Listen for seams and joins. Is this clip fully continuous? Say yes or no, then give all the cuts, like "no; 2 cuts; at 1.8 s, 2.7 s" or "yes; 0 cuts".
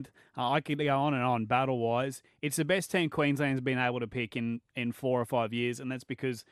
yes; 0 cuts